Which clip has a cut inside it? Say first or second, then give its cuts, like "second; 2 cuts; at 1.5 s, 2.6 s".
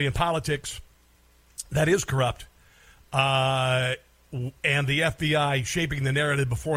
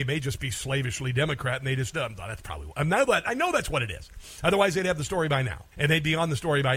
second; 2 cuts; at 1.9 s, 5.7 s